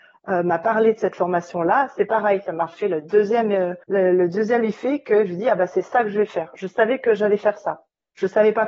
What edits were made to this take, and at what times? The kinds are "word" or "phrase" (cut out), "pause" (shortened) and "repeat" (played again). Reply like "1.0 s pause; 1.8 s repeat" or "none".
3.8 s pause